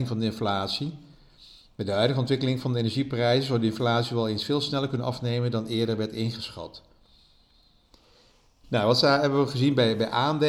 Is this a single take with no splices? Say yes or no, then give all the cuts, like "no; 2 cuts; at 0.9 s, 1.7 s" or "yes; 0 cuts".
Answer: yes; 0 cuts